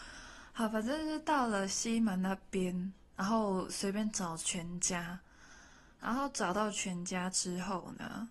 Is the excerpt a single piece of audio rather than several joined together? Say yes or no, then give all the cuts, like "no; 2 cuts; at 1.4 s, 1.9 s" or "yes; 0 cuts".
yes; 0 cuts